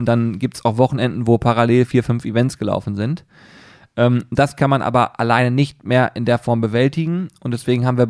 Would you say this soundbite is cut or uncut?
uncut